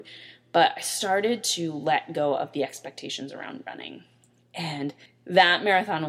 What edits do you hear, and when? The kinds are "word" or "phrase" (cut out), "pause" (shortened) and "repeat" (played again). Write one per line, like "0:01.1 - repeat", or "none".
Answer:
0:05.1 - pause